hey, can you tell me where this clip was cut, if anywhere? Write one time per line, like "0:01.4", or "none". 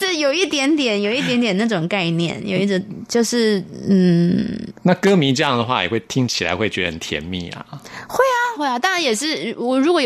0:04.8
0:08.6